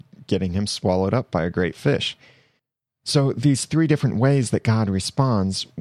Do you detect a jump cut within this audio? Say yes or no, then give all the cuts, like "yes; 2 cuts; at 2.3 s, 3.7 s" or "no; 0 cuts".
no; 0 cuts